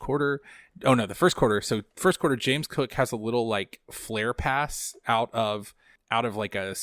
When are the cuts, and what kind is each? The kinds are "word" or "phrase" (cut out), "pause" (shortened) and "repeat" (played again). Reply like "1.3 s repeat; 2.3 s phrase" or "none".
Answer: none